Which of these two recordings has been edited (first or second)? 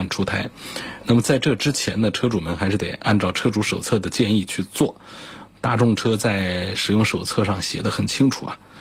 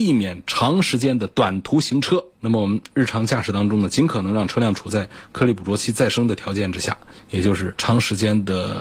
second